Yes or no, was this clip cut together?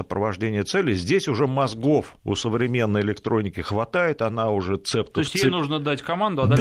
yes